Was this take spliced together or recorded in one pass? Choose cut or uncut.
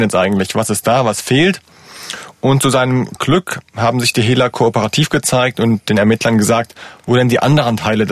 uncut